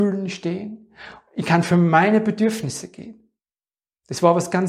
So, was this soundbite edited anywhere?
no; 0 cuts

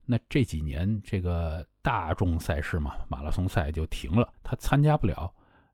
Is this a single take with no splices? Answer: no; 1 cut; at 4.3 s

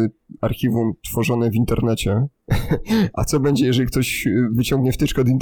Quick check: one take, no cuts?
yes; 0 cuts

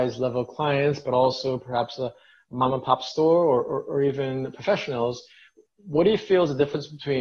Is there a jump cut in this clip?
no; 0 cuts

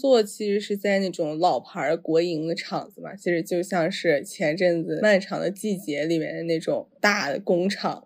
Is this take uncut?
no; 1 cut; at 6.9 s

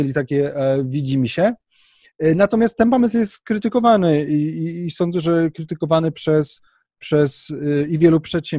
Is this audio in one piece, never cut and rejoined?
yes; 0 cuts

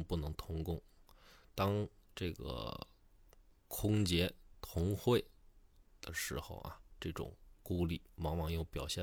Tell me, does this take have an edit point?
no; 0 cuts

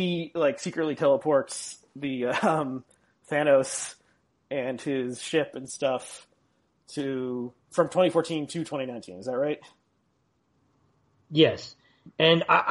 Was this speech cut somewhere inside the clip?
yes; 1 cut; at 7.6 s

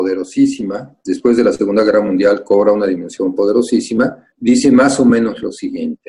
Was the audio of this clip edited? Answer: yes; 1 cut; at 4.3 s

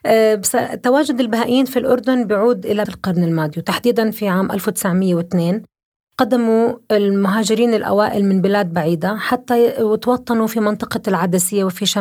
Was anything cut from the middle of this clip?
yes; 1 cut; at 2.9 s

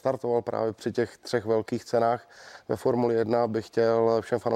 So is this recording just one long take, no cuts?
yes; 0 cuts

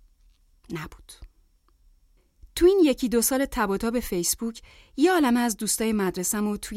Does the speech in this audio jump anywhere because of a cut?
no; 0 cuts

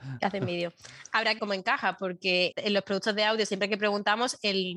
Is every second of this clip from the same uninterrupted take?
no; 2 cuts; at 1.4 s, 2.5 s

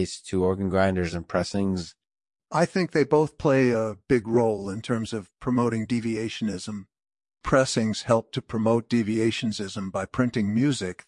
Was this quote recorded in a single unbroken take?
yes; 0 cuts

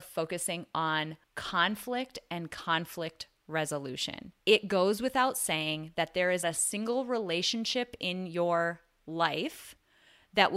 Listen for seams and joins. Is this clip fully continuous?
no; 3 cuts; at 1.2 s, 4.4 s, 6.4 s

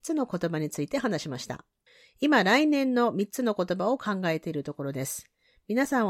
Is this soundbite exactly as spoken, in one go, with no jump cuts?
no; 1 cut; at 1.9 s

